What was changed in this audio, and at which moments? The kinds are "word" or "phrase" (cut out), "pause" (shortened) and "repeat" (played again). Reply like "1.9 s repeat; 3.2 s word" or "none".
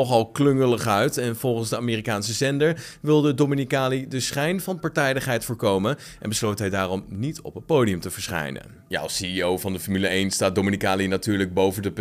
none